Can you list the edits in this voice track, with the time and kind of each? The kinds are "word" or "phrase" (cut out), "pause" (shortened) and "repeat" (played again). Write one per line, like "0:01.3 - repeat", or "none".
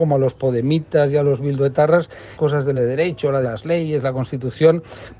0:02.4 - word
0:02.8 - word
0:03.4 - word

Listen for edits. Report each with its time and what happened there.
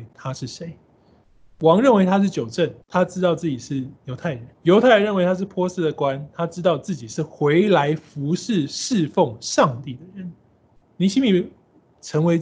0:02.8 - pause
0:04.0 - pause
0:04.5 - pause
0:10.8 - pause

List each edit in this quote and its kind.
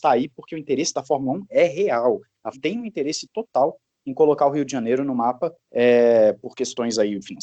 0:02.5 - word
0:05.6 - pause

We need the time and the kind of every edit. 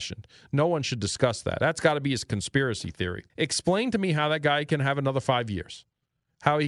0:03.3 - pause

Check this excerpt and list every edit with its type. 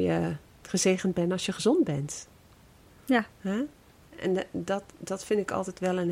0:03.3 - pause

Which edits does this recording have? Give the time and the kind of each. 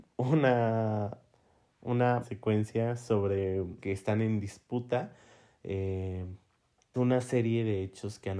0:02.2 - word
0:03.8 - word
0:06.9 - word

